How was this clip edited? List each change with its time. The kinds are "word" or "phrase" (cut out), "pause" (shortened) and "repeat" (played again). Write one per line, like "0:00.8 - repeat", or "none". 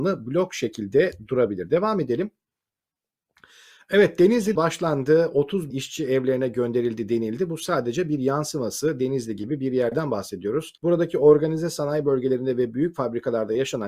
0:04.6 - phrase
0:05.7 - word
0:10.8 - pause